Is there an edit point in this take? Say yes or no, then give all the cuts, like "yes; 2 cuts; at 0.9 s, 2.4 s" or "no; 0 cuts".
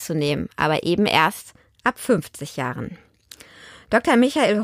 no; 0 cuts